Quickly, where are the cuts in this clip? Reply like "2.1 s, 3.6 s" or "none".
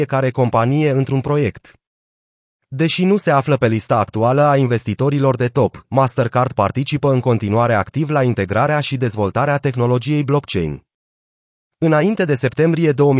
none